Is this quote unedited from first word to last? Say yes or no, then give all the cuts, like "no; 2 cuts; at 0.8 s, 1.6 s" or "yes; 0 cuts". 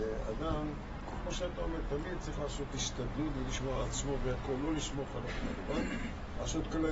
yes; 0 cuts